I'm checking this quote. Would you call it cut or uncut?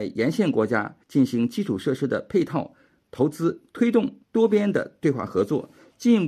cut